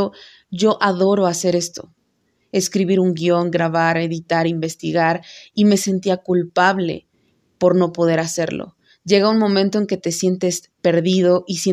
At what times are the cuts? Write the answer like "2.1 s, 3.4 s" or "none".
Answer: none